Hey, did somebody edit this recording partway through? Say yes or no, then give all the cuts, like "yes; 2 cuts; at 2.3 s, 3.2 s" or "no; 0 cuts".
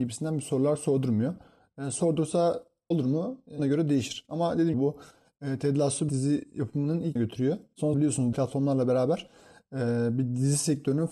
yes; 7 cuts; at 2.9 s, 3.6 s, 4.7 s, 6.1 s, 7.2 s, 7.9 s, 8.3 s